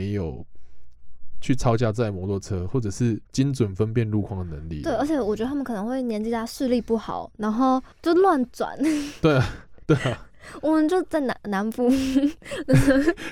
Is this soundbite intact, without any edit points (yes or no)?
no